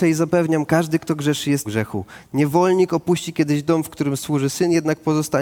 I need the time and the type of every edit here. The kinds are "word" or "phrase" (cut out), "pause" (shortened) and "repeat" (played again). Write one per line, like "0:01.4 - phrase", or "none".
0:01.6 - word